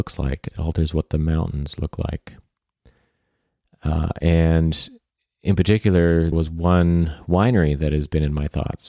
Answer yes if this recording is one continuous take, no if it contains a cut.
no